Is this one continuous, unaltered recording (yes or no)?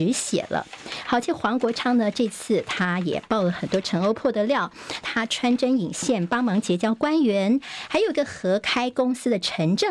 no